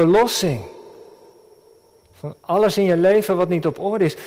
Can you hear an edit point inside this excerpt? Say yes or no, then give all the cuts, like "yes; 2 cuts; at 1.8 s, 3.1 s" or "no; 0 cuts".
no; 0 cuts